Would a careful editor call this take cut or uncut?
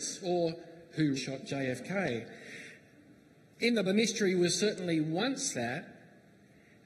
cut